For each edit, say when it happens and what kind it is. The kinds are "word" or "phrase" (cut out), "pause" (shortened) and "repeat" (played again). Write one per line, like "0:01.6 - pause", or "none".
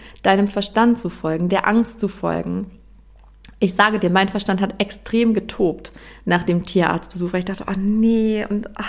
none